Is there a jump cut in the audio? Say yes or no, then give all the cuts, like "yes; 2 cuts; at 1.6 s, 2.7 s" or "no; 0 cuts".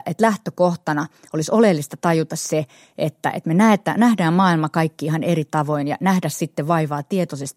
no; 0 cuts